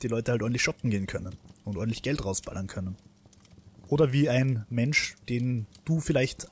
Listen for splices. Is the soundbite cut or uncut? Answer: cut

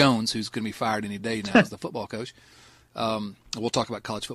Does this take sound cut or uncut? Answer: uncut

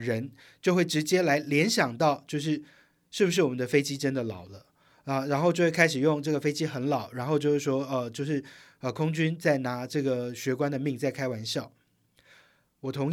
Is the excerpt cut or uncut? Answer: uncut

